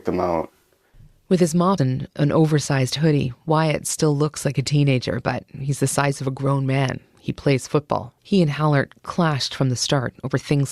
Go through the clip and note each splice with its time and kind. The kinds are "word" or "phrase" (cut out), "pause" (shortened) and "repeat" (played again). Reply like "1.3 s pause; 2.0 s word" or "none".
1.8 s phrase; 8.2 s pause

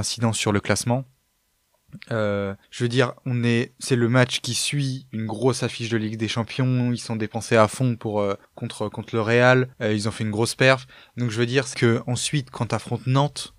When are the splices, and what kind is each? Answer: 2.6 s pause; 8.4 s pause; 9.7 s pause; 11.7 s word

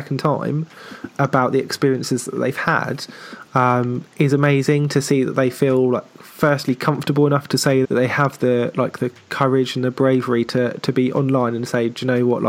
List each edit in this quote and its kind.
7.8 s word

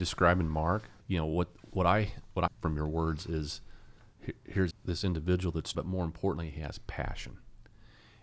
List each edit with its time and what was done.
1.0 s pause; 1.7 s word; 2.5 s word; 4.7 s word; 5.7 s word

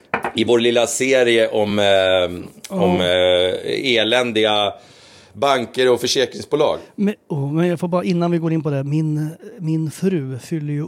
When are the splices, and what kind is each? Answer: none

